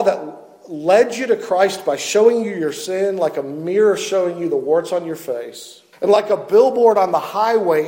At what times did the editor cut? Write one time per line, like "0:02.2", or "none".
0:05.9